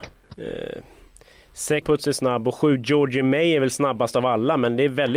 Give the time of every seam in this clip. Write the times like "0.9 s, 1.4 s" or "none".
1.8 s

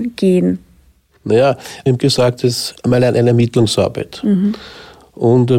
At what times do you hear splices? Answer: 2.0 s, 2.4 s, 2.8 s

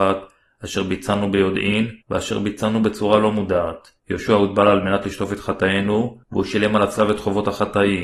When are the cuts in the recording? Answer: 2.0 s, 4.0 s, 6.2 s

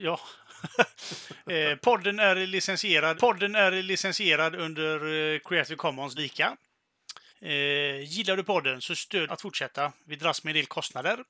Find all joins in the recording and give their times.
3.1 s, 6.2 s, 7.3 s, 9.3 s

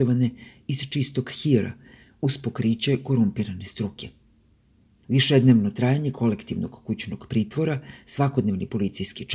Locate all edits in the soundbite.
none

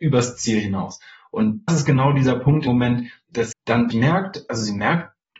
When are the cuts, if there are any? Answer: 1.7 s, 2.7 s, 3.5 s, 3.9 s

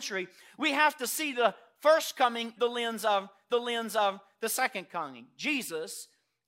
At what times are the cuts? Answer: 2.6 s, 3.5 s

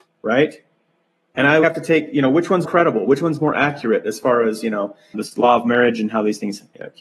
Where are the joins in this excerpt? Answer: 1.6 s, 2.6 s, 5.1 s

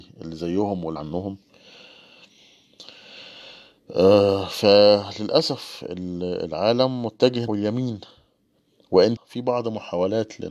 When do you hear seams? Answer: 1.0 s, 7.5 s, 9.2 s

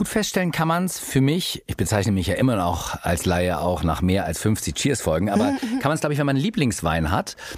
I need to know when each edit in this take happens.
none

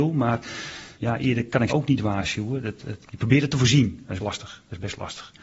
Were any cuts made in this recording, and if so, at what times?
0.9 s, 1.7 s, 3.0 s, 4.2 s

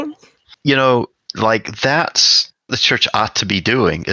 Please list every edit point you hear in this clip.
2.7 s

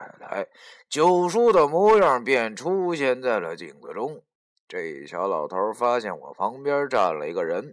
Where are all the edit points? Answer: none

